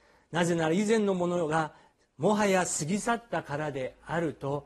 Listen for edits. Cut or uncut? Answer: uncut